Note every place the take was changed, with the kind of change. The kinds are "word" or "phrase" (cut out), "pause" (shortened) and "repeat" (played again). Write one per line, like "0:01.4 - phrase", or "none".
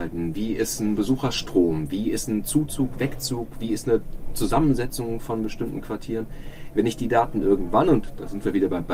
none